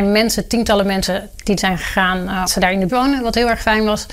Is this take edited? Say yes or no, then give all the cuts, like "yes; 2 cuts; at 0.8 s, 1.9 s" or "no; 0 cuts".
yes; 3 cuts; at 1.6 s, 2.5 s, 2.9 s